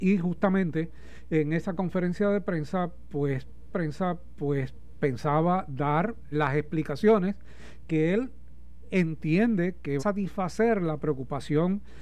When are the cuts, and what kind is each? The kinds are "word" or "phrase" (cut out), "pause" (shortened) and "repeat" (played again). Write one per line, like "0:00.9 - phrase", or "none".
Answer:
0:03.7 - repeat
0:06.3 - word
0:10.0 - phrase